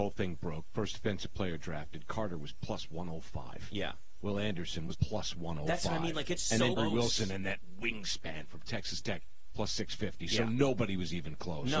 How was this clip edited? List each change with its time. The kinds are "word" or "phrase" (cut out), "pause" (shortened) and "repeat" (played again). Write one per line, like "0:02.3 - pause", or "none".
0:04.9 - word
0:06.8 - word

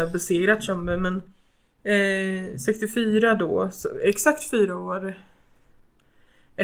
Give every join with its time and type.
none

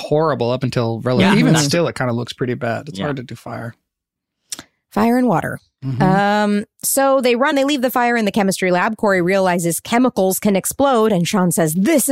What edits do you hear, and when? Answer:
0:07.5 - phrase

